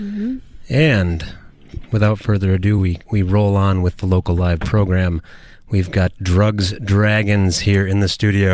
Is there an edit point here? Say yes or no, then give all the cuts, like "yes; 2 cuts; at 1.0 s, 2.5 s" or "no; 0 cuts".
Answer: no; 0 cuts